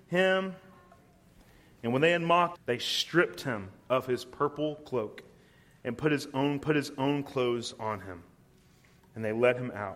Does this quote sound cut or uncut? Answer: cut